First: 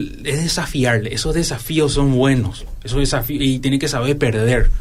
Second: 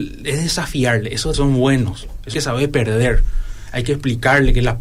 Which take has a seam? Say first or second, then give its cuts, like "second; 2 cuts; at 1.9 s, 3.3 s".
second; 2 cuts; at 1.3 s, 2.3 s